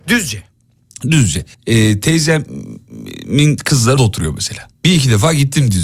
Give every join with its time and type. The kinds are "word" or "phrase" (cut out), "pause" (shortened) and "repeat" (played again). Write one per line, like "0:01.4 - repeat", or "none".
0:01.5 - pause
0:04.0 - word
0:04.7 - pause